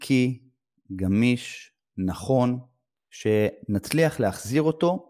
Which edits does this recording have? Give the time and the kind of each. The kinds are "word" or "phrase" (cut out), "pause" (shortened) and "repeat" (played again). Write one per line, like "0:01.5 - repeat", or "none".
none